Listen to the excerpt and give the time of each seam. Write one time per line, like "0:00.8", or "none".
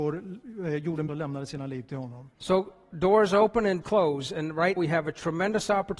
0:01.1
0:02.3
0:03.8
0:04.8